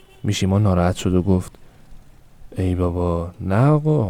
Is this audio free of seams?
yes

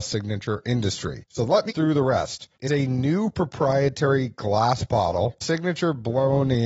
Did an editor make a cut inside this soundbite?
yes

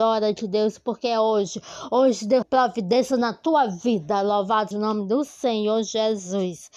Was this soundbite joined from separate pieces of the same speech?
yes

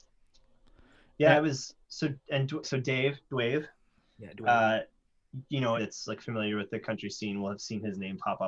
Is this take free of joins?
no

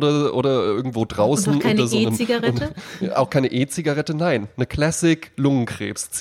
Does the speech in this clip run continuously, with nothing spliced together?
yes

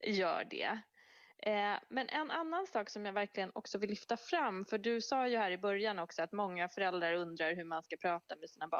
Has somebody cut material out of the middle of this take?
no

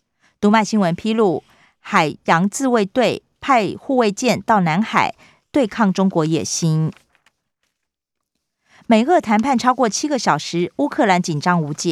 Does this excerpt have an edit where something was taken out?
no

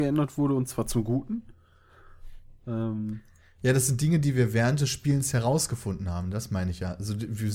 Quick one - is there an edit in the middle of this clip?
no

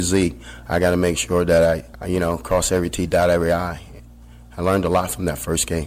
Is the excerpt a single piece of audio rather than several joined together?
no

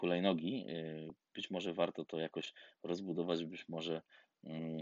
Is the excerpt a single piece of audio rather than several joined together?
yes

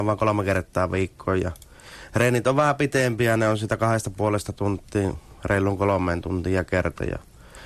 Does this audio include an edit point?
no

